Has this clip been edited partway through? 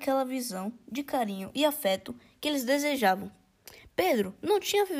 no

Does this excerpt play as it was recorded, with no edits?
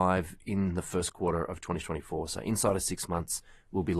yes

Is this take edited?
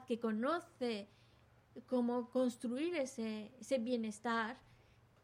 no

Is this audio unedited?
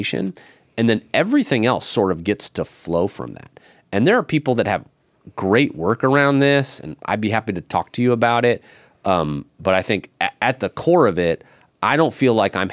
yes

